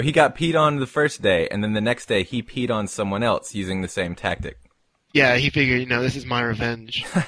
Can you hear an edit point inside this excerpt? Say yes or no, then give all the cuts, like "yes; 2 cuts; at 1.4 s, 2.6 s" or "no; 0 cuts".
no; 0 cuts